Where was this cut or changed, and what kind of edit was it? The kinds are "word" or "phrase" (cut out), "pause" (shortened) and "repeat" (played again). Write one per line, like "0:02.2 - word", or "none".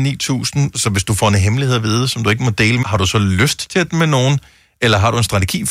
0:02.8 - word
0:03.9 - word